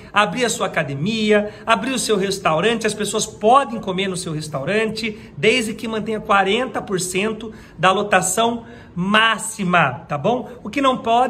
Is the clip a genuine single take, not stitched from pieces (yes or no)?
yes